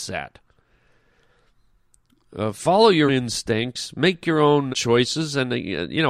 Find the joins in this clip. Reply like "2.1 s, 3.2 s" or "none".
3.1 s, 4.7 s